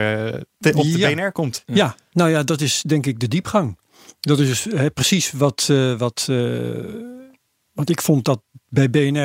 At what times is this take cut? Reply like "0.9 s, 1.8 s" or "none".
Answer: none